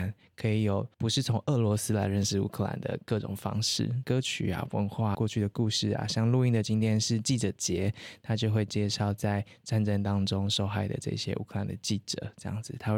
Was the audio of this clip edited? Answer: yes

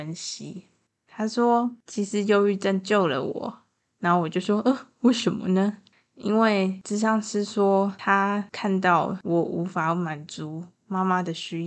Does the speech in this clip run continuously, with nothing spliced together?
yes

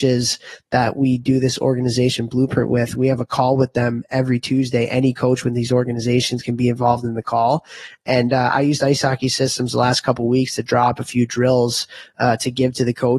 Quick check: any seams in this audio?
no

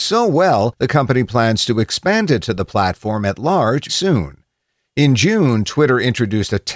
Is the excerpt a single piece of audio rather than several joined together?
no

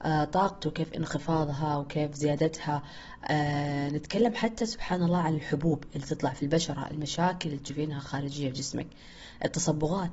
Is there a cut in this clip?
no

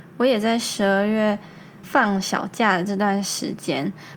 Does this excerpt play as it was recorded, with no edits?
no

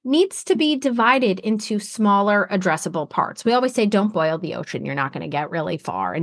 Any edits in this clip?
no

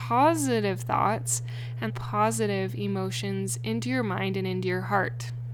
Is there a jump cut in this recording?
yes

